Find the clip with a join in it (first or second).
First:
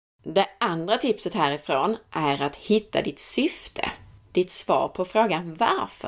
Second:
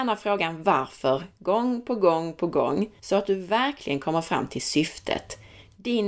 second